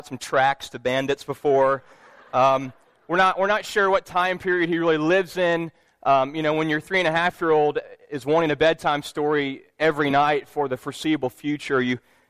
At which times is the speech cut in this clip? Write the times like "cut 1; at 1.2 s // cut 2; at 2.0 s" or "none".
none